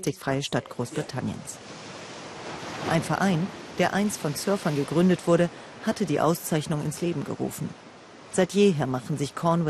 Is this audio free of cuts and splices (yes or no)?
yes